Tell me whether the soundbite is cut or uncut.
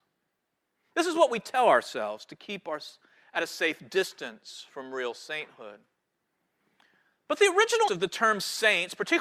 cut